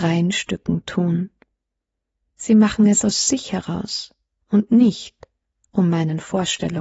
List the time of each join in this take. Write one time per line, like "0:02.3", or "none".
none